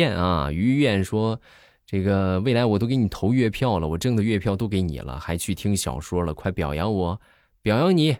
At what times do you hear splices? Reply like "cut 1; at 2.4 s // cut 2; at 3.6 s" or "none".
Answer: none